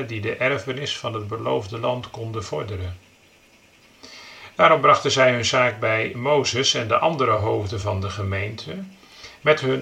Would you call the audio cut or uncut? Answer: uncut